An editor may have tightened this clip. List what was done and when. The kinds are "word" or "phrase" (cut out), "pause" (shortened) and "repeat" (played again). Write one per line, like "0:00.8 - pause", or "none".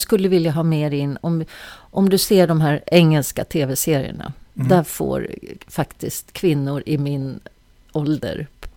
none